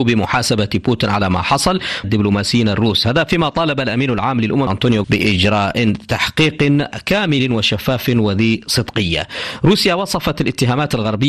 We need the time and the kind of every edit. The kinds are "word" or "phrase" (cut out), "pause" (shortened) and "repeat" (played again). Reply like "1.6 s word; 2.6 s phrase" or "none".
2.0 s phrase; 4.7 s word; 5.0 s word